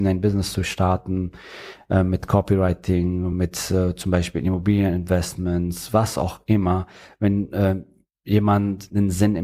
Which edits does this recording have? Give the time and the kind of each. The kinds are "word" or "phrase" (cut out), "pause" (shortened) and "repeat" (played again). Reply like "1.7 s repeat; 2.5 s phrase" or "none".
none